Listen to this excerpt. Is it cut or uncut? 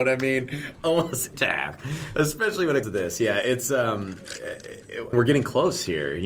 cut